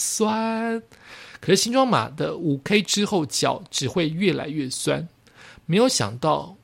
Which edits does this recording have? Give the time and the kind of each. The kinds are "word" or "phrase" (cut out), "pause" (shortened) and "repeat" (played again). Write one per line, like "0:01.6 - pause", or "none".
none